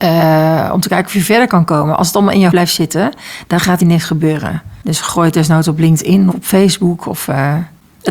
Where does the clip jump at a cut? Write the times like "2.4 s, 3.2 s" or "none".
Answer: 2.5 s, 3.8 s, 6.3 s